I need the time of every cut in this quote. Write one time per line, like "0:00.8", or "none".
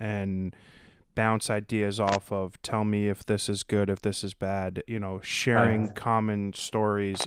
0:04.9